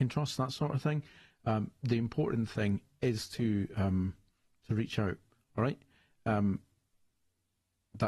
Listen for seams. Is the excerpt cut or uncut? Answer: uncut